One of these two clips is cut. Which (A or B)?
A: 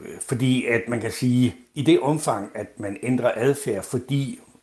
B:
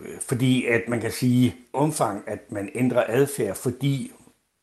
B